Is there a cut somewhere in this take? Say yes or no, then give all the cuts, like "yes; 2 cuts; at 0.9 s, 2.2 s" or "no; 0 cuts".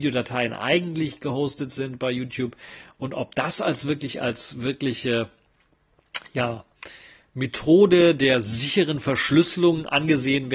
no; 0 cuts